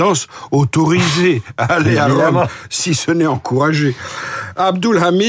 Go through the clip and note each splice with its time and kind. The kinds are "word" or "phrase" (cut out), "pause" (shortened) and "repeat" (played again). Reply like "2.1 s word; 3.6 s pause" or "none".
none